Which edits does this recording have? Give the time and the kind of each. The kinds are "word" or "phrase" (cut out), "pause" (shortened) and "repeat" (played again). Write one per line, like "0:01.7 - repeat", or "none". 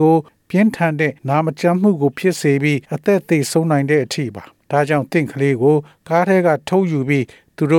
0:01.2 - pause
0:02.8 - pause
0:04.6 - pause